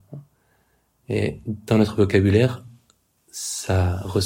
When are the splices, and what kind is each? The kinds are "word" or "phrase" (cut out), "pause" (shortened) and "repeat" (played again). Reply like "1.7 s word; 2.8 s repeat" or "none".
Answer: none